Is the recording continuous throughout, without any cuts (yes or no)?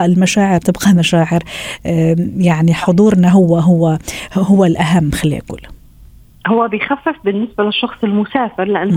yes